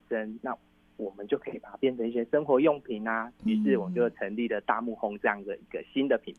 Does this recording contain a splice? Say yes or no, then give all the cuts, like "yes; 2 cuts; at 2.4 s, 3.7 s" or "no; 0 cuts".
no; 0 cuts